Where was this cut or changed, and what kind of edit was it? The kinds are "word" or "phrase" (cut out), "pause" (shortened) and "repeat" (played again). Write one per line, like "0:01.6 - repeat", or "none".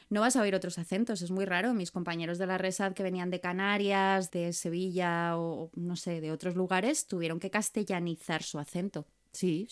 0:04.3 - word